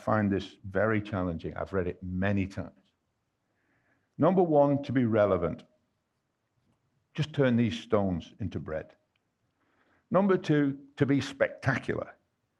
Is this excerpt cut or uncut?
uncut